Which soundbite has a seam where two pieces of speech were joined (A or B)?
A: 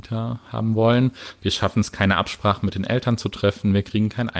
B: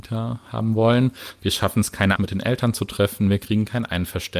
B